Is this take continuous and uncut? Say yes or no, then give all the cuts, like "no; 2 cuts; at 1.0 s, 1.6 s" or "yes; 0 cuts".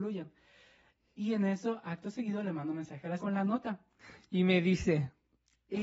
no; 1 cut; at 3.2 s